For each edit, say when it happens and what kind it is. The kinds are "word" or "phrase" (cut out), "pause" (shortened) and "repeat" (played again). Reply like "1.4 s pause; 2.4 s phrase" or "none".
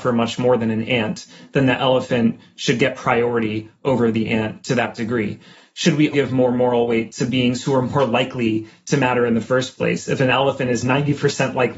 6.1 s word